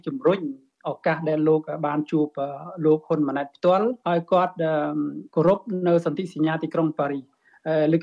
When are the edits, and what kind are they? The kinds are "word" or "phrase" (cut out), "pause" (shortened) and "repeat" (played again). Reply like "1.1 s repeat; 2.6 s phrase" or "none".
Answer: 4.0 s pause